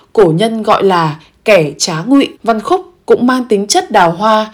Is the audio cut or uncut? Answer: cut